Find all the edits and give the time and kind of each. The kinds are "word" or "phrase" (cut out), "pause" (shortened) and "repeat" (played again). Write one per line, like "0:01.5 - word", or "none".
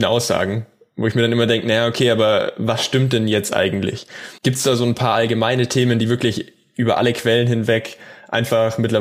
0:04.4 - pause